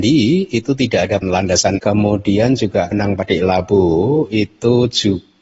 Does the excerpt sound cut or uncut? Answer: cut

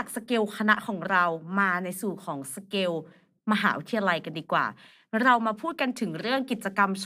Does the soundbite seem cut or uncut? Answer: uncut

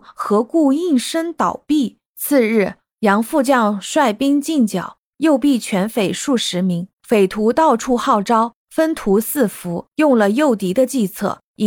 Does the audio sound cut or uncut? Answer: cut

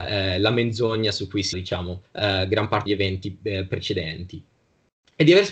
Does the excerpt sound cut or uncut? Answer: cut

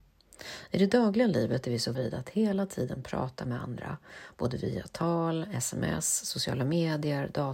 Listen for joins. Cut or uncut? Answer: cut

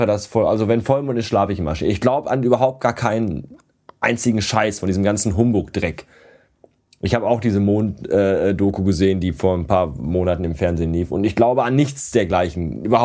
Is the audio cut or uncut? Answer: uncut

